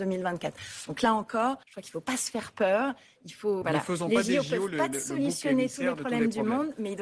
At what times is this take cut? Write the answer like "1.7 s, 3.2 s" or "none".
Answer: 1.6 s, 3.6 s